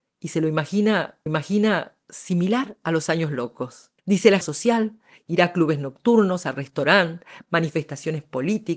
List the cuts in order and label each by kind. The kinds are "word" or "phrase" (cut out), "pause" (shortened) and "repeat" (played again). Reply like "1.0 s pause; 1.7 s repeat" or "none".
1.3 s repeat; 4.0 s pause; 4.4 s phrase